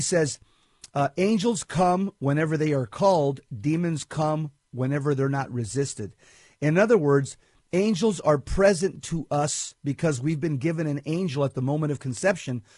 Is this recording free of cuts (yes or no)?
yes